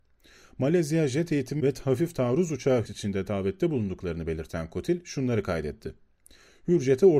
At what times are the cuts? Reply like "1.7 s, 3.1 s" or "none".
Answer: 2.9 s